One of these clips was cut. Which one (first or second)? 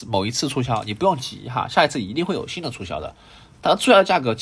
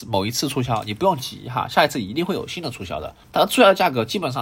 second